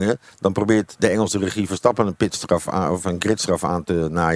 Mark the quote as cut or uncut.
uncut